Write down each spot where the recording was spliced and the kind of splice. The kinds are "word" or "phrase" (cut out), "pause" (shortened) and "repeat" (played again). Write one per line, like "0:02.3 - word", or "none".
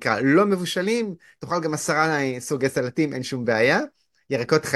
none